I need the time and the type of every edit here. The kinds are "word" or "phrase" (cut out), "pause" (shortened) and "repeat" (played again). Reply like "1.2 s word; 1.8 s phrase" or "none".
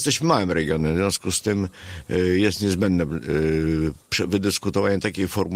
none